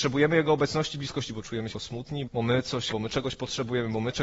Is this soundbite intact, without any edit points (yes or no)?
no